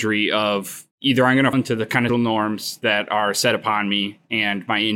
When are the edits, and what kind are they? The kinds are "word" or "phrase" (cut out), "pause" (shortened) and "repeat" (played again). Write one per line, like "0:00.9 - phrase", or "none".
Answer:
0:00.9 - pause
0:01.5 - word
0:02.1 - word